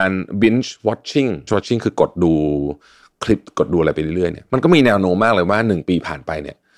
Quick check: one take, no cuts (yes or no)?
no